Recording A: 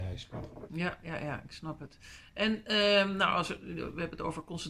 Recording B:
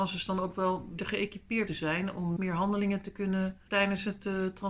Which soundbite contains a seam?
B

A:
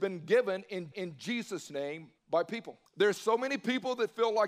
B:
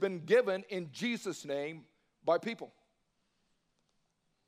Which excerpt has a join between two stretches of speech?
A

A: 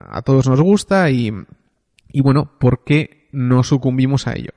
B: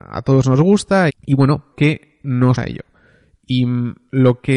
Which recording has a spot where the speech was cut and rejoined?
B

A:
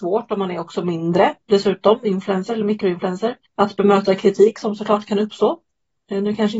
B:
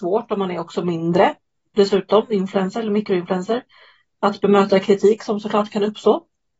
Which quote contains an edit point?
A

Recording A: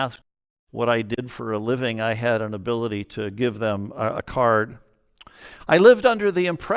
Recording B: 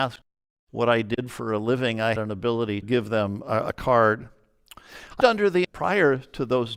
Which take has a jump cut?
B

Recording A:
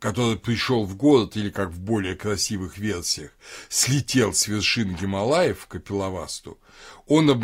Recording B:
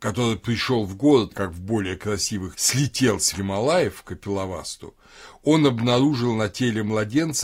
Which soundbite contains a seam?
B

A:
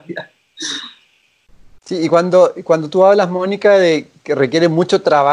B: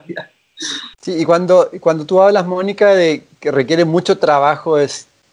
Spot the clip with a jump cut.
B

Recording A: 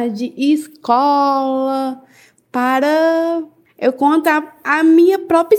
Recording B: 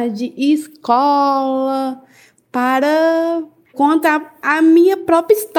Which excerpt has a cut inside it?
B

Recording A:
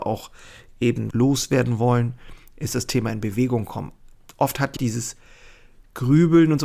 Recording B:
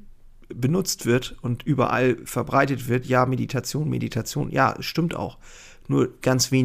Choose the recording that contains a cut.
A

